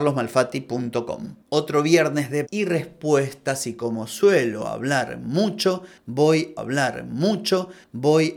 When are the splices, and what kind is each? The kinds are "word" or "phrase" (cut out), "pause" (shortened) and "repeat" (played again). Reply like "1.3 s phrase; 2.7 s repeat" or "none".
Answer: 2.5 s word; 6.6 s repeat